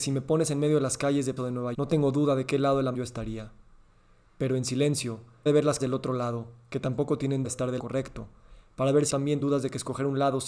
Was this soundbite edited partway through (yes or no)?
yes